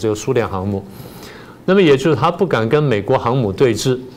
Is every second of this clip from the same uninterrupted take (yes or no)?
yes